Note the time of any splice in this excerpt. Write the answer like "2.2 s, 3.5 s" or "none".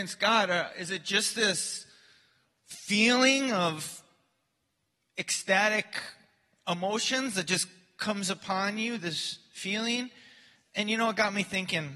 none